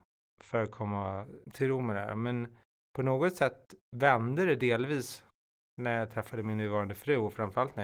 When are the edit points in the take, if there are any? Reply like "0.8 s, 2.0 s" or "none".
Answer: 1.4 s

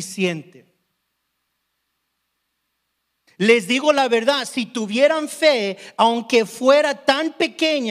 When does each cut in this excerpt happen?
none

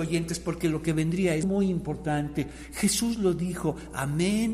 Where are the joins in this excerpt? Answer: 1.4 s

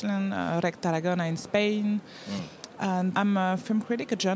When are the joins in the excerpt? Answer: 3.1 s

